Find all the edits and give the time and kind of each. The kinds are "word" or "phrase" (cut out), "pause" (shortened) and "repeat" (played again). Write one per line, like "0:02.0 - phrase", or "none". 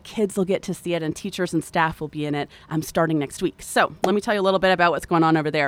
none